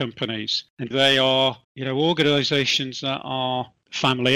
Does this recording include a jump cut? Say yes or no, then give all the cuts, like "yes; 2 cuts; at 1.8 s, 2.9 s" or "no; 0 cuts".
yes; 2 cuts; at 0.9 s, 1.6 s